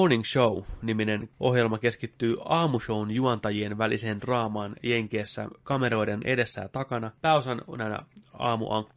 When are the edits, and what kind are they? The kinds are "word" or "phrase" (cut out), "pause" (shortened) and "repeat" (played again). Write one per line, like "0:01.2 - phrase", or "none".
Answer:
0:01.3 - pause
0:07.2 - pause